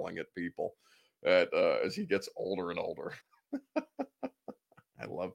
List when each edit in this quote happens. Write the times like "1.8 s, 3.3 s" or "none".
3.2 s

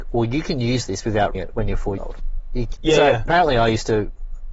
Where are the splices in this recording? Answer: 1.3 s, 2.0 s, 2.8 s

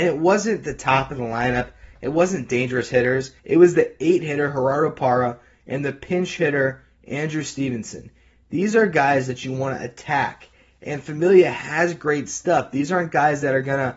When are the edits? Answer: 3.4 s

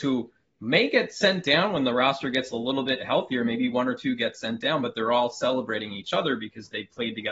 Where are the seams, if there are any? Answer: none

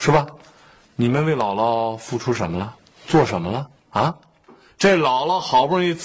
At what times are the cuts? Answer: 3.8 s

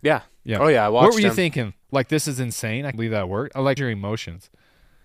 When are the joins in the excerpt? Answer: 1.8 s, 2.9 s, 3.8 s

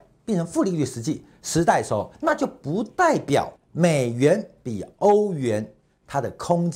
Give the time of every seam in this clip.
2.1 s, 3.6 s

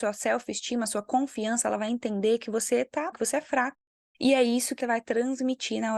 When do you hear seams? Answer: 3.1 s, 4.8 s

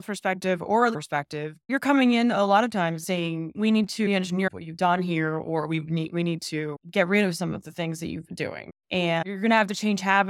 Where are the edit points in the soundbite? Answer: 0.9 s, 1.6 s, 3.0 s, 3.5 s, 6.8 s

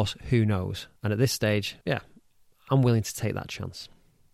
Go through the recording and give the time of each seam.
1.0 s, 1.8 s

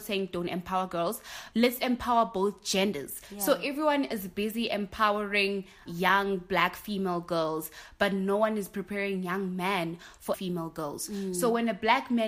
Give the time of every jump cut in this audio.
1.5 s, 5.9 s, 10.3 s

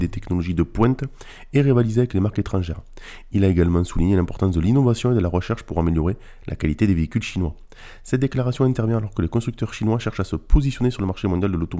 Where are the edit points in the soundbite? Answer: none

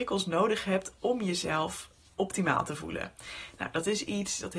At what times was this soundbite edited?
none

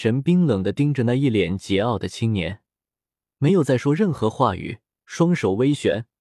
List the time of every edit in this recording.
4.8 s

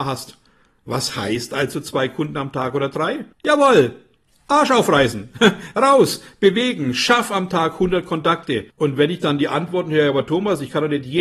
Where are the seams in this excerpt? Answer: 3.3 s, 8.7 s

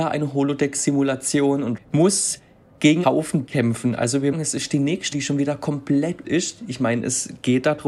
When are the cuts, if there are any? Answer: 1.8 s, 3.0 s, 3.5 s, 4.3 s, 5.1 s, 6.2 s

